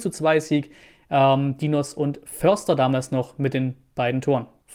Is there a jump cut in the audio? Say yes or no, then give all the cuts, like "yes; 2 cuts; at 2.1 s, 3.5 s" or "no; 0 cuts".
no; 0 cuts